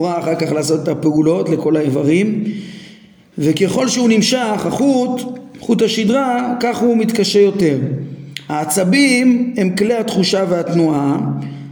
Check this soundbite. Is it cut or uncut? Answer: uncut